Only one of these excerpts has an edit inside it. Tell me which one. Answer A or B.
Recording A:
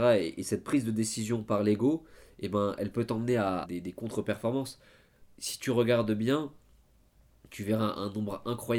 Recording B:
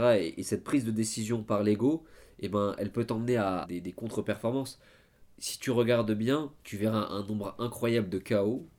B